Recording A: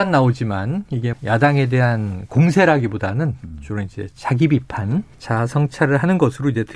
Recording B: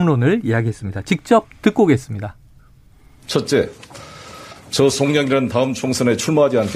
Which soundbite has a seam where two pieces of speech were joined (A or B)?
A